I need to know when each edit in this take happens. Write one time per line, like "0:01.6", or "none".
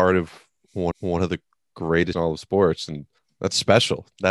0:00.9
0:02.1
0:03.2